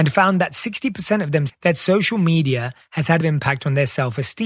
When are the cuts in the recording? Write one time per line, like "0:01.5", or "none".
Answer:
0:01.5
0:03.2